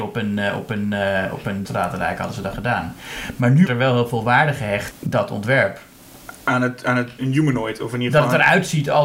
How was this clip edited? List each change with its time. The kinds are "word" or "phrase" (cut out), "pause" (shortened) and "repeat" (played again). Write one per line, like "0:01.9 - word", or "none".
0:01.6 - word
0:03.7 - word
0:04.9 - word
0:07.2 - word